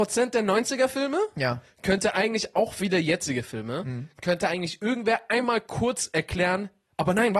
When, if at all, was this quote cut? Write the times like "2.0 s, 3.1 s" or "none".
none